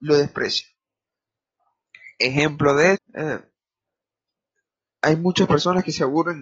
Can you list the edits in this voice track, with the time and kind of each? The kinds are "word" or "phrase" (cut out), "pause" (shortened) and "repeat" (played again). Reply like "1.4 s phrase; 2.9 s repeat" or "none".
2.9 s word